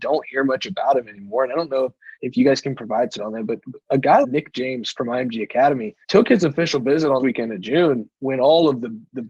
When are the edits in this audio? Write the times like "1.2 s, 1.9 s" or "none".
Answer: 2.1 s, 3.2 s, 3.8 s, 4.2 s, 4.9 s, 6.0 s, 7.2 s

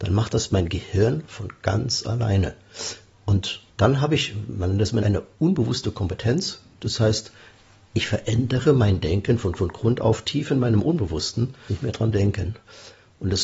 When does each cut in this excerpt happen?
3.7 s, 5.0 s, 9.6 s, 11.7 s

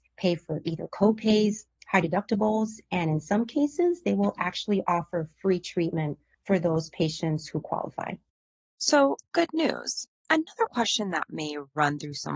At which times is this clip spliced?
none

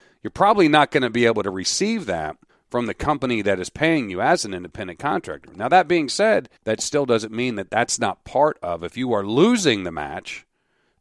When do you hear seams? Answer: 2.5 s, 6.6 s

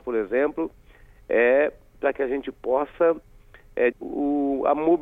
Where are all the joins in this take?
3.9 s

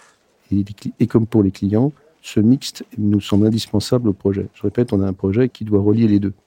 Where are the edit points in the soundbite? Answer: 5.5 s

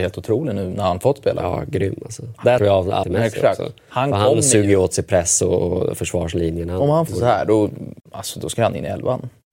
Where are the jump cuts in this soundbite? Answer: 2.6 s, 3.0 s, 7.1 s, 8.0 s

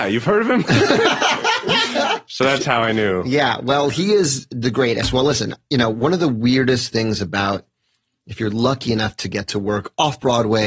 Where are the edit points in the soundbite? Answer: none

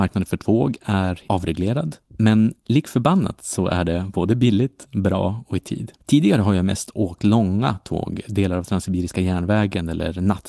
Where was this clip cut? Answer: 6.0 s

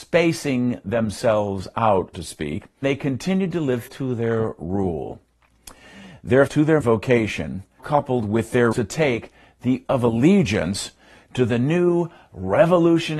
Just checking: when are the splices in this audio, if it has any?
2.1 s, 2.8 s, 3.9 s, 6.5 s, 6.8 s, 7.8 s, 8.7 s, 9.9 s

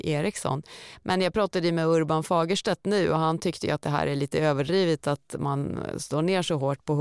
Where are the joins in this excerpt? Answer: none

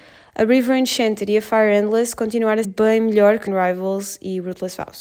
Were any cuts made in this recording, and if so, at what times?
2.6 s, 3.5 s

